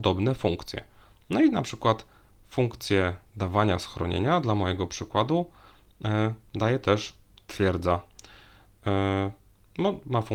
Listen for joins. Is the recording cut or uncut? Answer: uncut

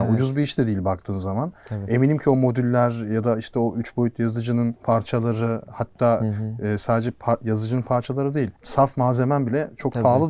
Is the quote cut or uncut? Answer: uncut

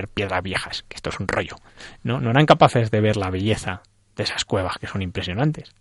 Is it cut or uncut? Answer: uncut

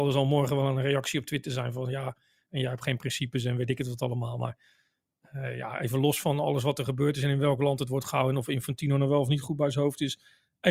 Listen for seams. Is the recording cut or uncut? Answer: uncut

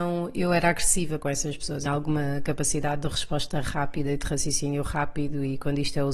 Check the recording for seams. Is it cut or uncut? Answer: cut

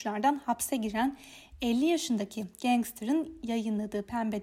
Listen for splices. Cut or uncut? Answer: uncut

